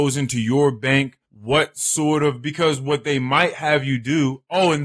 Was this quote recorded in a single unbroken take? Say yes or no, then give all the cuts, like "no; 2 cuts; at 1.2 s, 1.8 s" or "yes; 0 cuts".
no; 1 cut; at 1.2 s